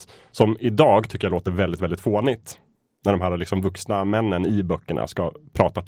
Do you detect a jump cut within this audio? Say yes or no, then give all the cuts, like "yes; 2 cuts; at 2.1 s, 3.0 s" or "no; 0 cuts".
no; 0 cuts